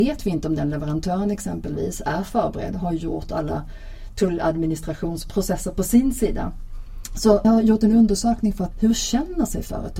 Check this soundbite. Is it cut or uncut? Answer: cut